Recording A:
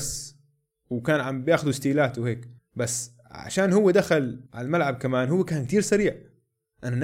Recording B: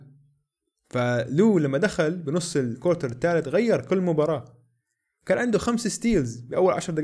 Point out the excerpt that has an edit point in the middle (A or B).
A